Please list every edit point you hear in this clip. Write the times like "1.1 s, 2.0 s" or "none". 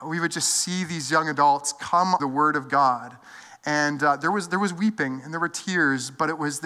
2.2 s